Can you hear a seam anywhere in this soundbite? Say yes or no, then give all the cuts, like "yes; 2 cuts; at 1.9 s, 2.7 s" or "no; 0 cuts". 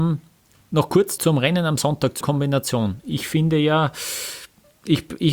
yes; 2 cuts; at 1.2 s, 2.2 s